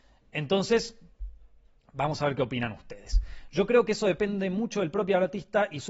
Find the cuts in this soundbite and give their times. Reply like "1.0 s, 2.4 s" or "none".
none